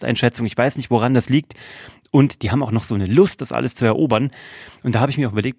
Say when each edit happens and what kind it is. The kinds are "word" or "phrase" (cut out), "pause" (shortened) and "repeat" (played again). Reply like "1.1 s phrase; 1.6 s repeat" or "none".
none